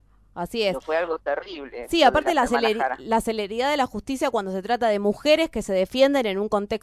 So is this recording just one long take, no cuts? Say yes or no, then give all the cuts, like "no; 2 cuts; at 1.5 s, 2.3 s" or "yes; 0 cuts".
yes; 0 cuts